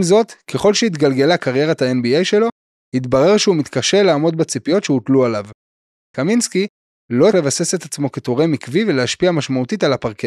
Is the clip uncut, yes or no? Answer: no